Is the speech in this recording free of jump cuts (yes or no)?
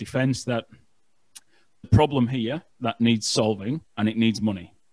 no